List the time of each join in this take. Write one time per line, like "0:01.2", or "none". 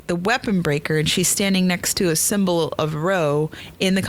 none